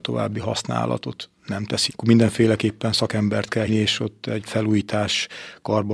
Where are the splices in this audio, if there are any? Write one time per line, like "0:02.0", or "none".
0:01.4
0:01.9
0:03.7
0:04.5